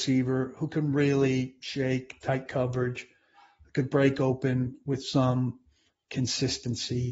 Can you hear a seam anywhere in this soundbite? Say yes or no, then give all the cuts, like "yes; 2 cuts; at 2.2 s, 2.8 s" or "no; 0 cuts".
no; 0 cuts